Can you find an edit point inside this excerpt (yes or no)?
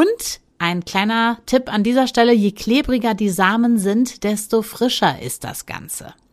no